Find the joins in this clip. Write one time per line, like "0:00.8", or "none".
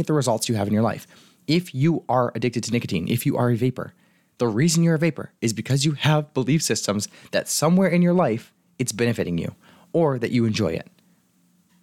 none

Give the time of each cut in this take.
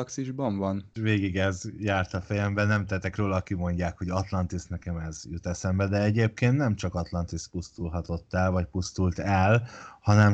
none

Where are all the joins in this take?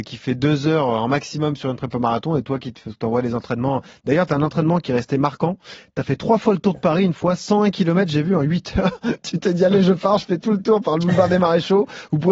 none

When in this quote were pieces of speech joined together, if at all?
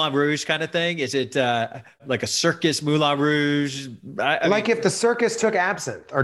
none

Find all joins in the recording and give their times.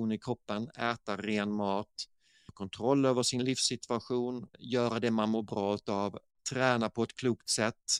0:04.5

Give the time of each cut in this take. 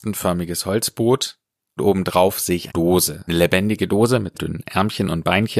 0:01.8
0:02.7
0:03.3
0:04.3

